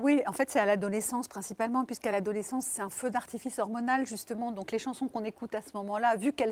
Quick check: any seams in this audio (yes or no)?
no